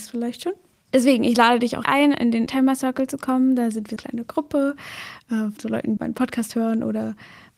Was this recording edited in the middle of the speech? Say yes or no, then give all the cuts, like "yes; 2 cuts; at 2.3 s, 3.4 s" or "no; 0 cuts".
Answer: yes; 5 cuts; at 1.8 s, 2.5 s, 4.0 s, 5.6 s, 6.0 s